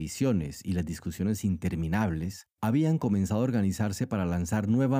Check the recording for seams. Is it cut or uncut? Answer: cut